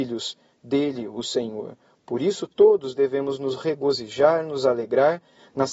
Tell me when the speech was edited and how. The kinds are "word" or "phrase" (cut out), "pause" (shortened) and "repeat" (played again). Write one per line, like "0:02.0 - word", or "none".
none